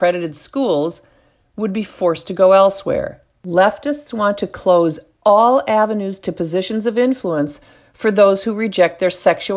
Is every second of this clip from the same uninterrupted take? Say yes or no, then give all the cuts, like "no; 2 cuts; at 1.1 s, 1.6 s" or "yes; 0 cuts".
yes; 0 cuts